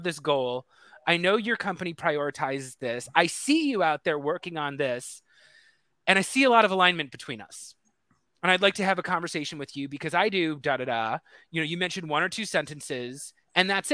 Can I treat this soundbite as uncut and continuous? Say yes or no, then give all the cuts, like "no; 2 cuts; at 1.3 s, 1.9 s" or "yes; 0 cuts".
yes; 0 cuts